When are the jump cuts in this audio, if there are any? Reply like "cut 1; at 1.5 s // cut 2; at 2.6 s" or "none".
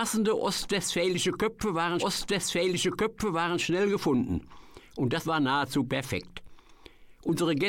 cut 1; at 2.0 s // cut 2; at 5.2 s